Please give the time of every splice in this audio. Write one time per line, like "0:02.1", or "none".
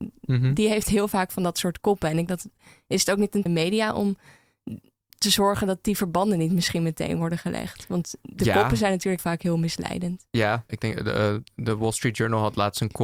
0:02.3
0:03.5
0:05.0
0:09.2
0:10.7